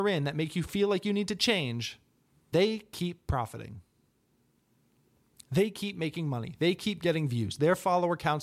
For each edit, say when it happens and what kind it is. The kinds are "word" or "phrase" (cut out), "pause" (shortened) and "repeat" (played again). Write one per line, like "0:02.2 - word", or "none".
0:02.5 - word

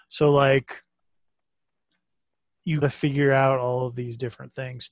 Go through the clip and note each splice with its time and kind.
0:02.8 - word

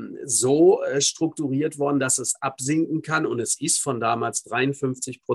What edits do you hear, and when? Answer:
none

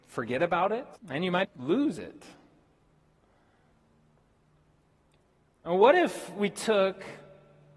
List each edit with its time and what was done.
0:01.0 - pause
0:01.4 - word

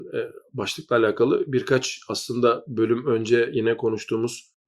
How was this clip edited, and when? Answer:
none

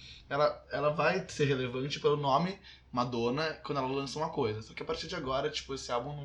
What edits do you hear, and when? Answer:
none

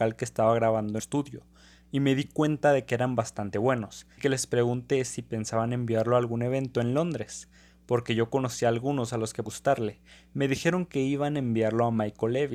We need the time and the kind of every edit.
0:01.0 - word
0:04.2 - word
0:09.5 - word

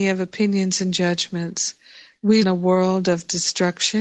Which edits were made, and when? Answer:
0:02.4 - phrase

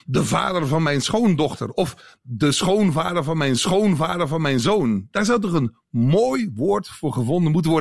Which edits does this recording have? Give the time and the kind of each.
0:03.6 - repeat

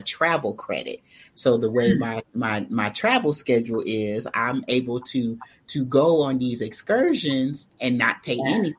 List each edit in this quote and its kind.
none

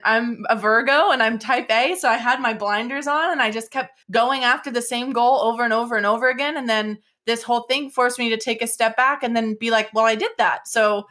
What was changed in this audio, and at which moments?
0:04.0 - pause

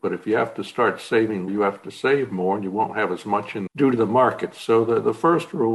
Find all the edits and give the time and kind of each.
0:01.5 - word
0:03.7 - word

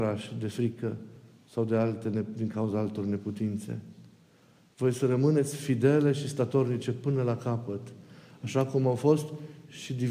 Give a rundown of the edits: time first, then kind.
none

